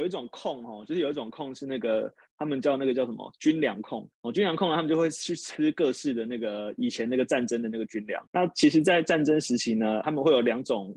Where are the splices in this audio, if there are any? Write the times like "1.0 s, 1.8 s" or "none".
4.1 s, 8.3 s, 10.0 s